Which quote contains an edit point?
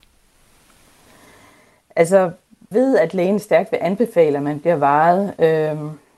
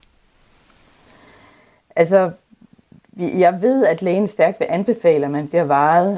first; 1 cut; at 2.7 s

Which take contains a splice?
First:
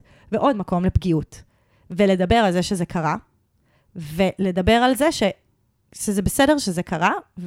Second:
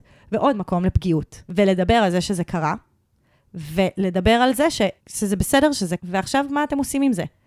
second; 3 cuts; at 1.4 s, 5.0 s, 6.0 s

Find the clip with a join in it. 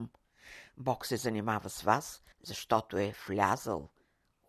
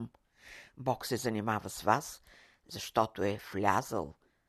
first; 1 cut; at 2.3 s

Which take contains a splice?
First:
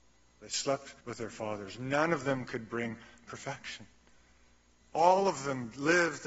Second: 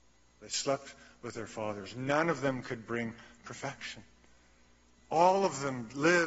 first; 1 cut; at 1.0 s

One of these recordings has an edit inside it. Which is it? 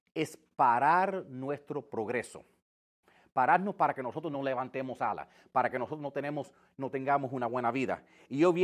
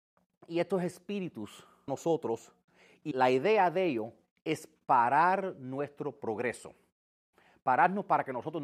second; 2 cuts; at 1.9 s, 3.1 s

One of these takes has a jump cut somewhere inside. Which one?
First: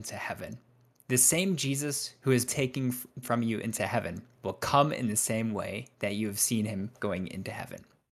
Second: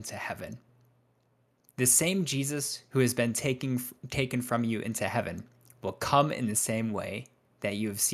first; 6 cuts; at 0.9 s, 2.5 s, 3.2 s, 4.3 s, 5.9 s, 6.9 s

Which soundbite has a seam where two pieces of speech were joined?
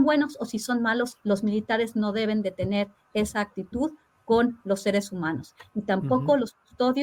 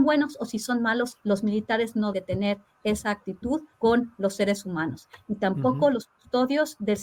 second; 2 cuts; at 2.1 s, 3.7 s

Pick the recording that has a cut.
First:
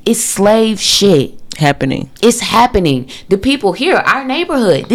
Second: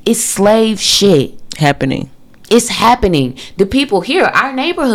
first; 1 cut; at 2.2 s

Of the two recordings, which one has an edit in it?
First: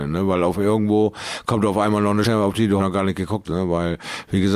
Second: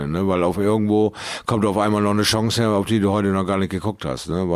first; 3 cuts; at 2.2 s, 2.8 s, 3.4 s

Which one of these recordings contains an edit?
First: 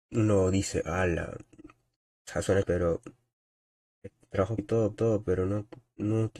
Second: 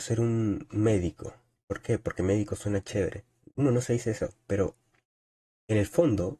first; 3 cuts; at 2.6 s, 4.6 s, 4.9 s

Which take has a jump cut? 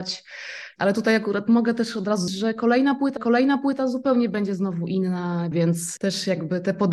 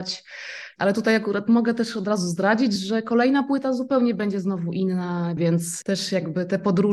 first; 2 cuts; at 2.3 s, 3.2 s

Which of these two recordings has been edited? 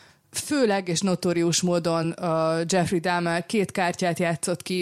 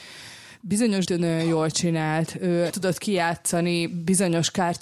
second; 2 cuts; at 1.0 s, 2.7 s

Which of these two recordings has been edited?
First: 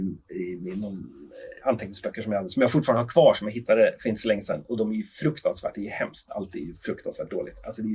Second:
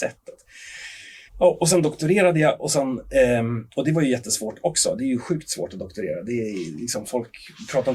second; 1 cut; at 1.3 s

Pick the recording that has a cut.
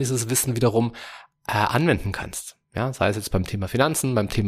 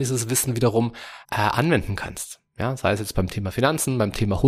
second; 1 cut; at 1.2 s

